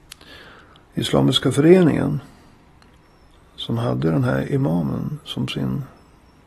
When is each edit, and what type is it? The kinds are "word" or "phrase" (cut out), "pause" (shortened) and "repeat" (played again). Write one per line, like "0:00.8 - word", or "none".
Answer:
none